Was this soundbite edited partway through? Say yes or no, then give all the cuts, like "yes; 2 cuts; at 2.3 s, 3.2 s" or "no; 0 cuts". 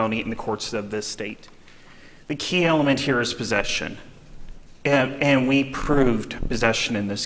no; 0 cuts